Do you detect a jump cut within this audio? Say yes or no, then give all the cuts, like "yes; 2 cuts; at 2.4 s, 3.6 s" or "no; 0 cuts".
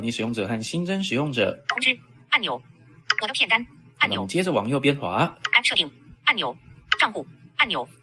no; 0 cuts